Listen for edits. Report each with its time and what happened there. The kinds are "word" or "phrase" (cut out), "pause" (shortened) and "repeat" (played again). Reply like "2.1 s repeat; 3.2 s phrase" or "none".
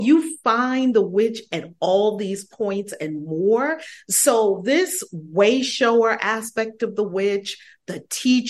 none